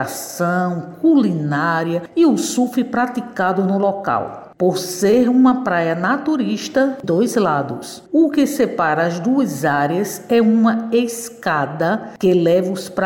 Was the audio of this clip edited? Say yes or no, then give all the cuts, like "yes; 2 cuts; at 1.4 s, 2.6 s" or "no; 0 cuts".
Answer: yes; 1 cut; at 7.0 s